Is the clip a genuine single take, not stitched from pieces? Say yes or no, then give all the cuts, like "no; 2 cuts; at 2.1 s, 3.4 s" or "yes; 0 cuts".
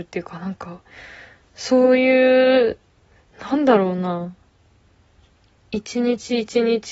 yes; 0 cuts